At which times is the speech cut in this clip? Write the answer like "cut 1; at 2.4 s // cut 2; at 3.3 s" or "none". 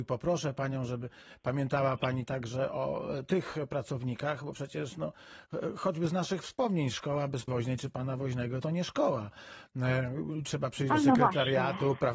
cut 1; at 2.2 s // cut 2; at 7.5 s // cut 3; at 8.6 s

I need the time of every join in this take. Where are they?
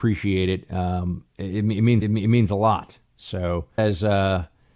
cut 1; at 1.3 s // cut 2; at 2.0 s // cut 3; at 3.8 s

